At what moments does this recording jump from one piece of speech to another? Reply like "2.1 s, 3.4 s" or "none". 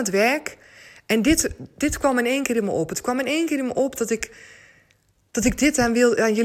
none